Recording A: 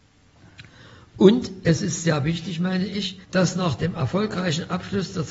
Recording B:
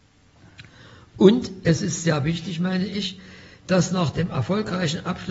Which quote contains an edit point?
A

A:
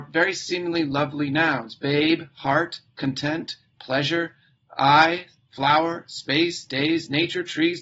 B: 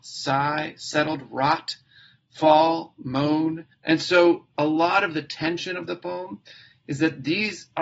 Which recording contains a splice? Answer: B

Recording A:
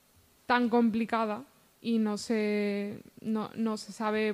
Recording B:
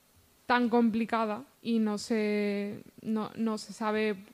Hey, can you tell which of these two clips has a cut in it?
B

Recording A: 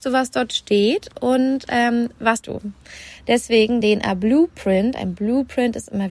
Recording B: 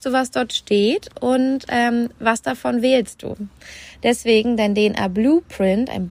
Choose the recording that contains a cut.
A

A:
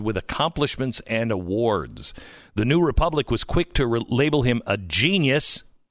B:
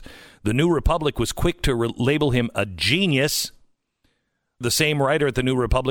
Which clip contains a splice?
B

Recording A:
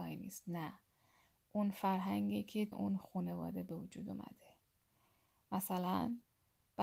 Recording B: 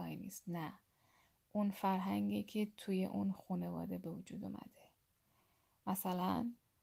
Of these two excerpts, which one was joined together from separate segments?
A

